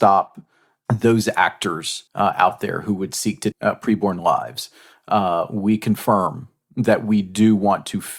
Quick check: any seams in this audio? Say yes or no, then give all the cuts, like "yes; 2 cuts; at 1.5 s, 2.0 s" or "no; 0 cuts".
yes; 2 cuts; at 2.1 s, 3.5 s